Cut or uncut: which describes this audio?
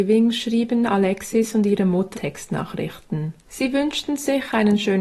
cut